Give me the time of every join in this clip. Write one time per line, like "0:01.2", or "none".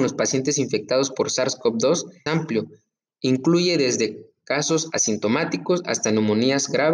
0:02.3